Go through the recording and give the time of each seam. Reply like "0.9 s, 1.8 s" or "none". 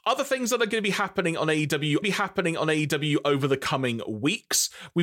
2.0 s